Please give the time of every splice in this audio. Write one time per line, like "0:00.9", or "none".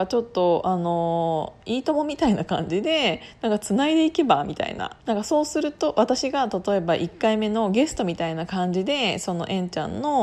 0:05.0